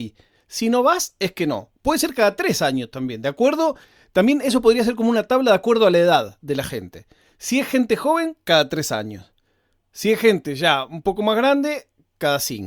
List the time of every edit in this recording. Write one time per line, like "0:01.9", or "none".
none